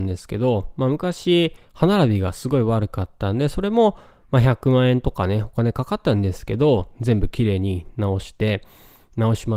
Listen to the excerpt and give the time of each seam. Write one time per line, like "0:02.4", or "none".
none